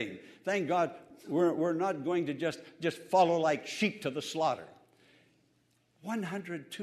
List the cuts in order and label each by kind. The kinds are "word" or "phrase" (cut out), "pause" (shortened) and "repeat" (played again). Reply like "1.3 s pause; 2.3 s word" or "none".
none